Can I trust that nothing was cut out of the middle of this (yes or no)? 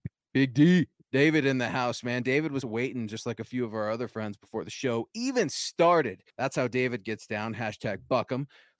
no